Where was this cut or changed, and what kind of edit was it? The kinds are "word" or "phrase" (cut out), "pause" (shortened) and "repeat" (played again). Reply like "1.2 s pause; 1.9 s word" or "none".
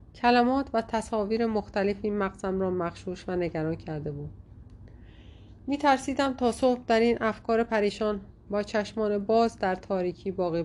none